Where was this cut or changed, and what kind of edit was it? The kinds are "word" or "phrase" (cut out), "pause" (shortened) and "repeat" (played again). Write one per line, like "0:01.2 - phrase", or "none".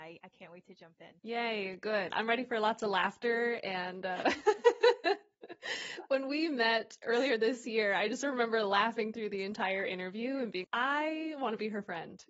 0:01.2 - pause
0:10.6 - word